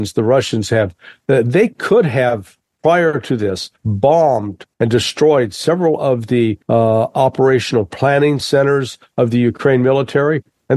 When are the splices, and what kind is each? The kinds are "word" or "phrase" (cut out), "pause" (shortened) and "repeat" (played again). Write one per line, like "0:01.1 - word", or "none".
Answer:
0:04.7 - pause
0:06.6 - pause
0:08.4 - phrase